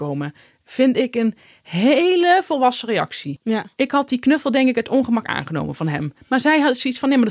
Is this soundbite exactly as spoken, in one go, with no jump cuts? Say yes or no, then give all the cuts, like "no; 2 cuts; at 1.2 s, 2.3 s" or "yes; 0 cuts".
yes; 0 cuts